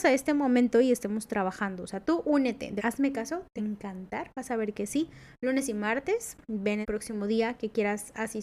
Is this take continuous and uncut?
no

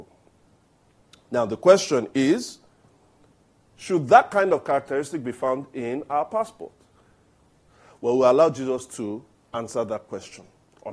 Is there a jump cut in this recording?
no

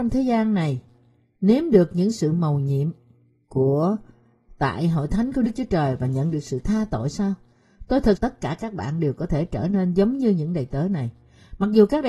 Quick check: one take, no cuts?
no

